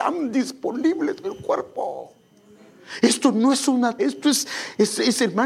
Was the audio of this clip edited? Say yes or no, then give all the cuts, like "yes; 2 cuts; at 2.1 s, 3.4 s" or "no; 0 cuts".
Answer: yes; 2 cuts; at 1.2 s, 4.0 s